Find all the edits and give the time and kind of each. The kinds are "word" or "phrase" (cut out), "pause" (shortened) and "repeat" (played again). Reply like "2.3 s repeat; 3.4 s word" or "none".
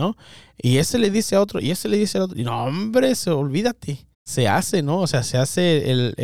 4.1 s pause